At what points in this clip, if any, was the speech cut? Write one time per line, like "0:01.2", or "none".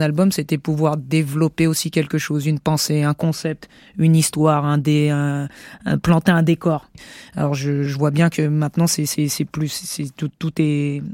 0:07.9

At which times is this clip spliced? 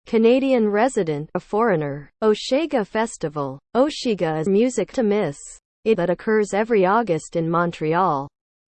0:01.3
0:02.1
0:03.7
0:04.5
0:04.9
0:05.9

